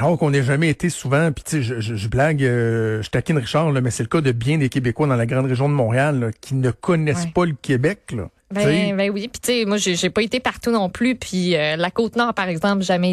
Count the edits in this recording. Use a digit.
1